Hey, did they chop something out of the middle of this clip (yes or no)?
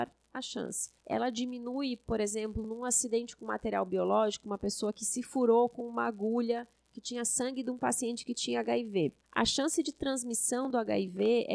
yes